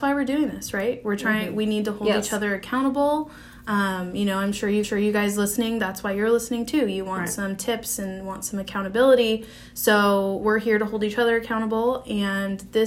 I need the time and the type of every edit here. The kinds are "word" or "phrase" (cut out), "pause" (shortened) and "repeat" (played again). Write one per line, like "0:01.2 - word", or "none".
0:04.8 - repeat